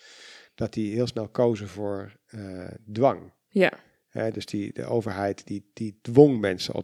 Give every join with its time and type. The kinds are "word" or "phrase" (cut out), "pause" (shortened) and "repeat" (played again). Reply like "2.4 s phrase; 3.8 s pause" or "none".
none